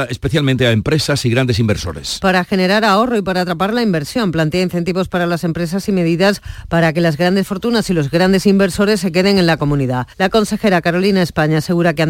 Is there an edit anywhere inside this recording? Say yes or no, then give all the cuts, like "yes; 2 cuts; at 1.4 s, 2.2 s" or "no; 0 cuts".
yes; 1 cut; at 10.1 s